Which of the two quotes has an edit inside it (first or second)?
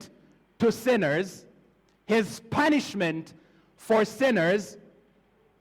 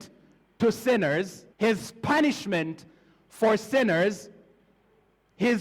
second